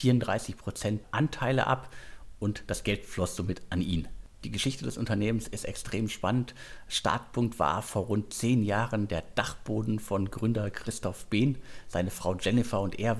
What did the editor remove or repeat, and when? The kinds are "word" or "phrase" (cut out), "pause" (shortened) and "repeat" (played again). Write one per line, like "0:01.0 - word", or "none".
0:01.0 - word